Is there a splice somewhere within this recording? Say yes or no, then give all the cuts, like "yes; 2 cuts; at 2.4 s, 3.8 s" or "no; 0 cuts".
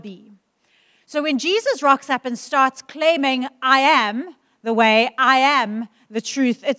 no; 0 cuts